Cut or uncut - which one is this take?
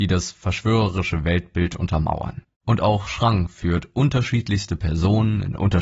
cut